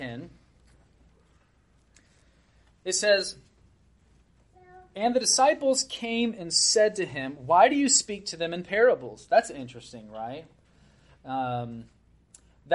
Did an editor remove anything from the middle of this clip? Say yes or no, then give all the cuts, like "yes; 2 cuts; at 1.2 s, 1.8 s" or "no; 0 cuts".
no; 0 cuts